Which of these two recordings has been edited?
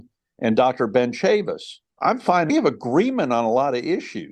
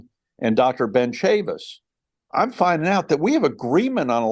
first; 2 cuts; at 1.9 s, 2.5 s

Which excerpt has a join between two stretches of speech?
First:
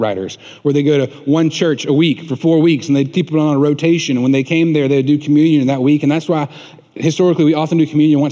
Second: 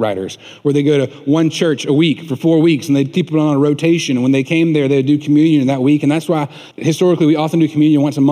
second; 1 cut; at 6.7 s

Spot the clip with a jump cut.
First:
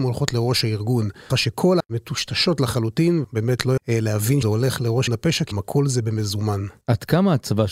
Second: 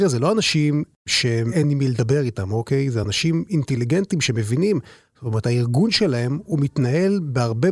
first; 7 cuts; at 1.3 s, 1.8 s, 3.2 s, 3.8 s, 4.4 s, 5.1 s, 5.5 s

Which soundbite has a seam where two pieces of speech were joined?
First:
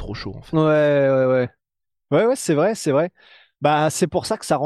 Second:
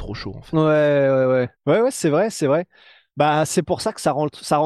second; 1 cut; at 1.5 s

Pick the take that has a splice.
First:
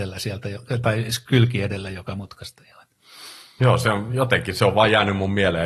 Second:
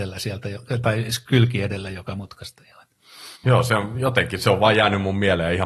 second; 1 cut; at 3.4 s

